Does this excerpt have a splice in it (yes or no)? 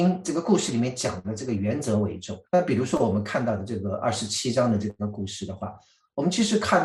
yes